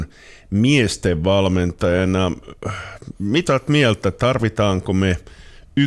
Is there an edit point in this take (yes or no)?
yes